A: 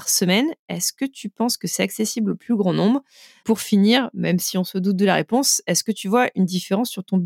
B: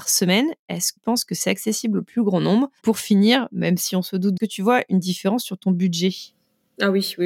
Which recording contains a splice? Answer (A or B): B